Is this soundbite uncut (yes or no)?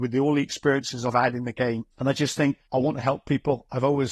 no